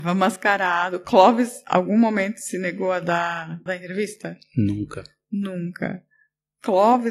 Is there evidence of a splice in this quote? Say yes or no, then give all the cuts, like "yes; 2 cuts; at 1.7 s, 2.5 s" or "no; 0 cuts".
yes; 1 cut; at 3.7 s